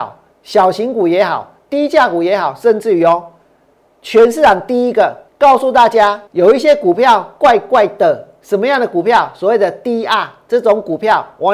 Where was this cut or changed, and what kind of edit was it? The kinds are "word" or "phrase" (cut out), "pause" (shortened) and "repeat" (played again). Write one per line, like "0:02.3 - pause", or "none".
0:05.3 - pause
0:06.3 - pause